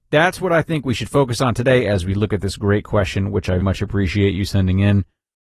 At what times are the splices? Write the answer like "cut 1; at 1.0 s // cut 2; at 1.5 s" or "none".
cut 1; at 3.6 s